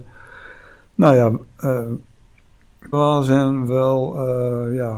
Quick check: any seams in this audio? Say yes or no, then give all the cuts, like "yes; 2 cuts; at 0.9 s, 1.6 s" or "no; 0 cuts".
yes; 2 cuts; at 2.9 s, 3.7 s